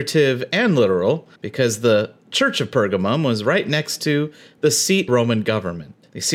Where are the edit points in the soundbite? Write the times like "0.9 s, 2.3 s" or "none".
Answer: 1.4 s, 5.1 s